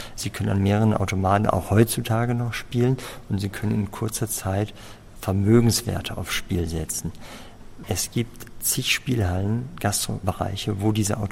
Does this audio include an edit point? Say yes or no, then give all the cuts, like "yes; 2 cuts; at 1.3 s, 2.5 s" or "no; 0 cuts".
no; 0 cuts